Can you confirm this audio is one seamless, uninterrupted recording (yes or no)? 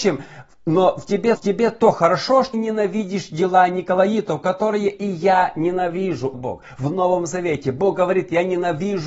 no